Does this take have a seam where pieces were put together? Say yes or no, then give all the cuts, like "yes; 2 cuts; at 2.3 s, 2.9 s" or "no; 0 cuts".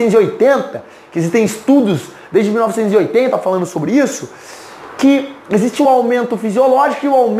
no; 0 cuts